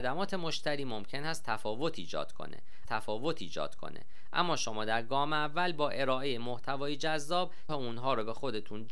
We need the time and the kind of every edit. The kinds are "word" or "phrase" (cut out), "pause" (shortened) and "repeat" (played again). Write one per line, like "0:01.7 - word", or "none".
0:02.9 - repeat
0:07.7 - word

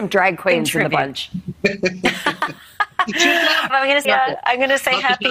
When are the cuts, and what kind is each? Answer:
0:03.7 - word
0:04.0 - word

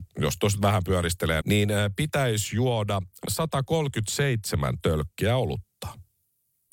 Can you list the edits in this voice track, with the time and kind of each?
0:01.4 - word
0:03.3 - word

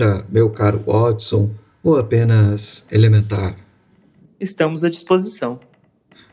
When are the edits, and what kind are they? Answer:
none

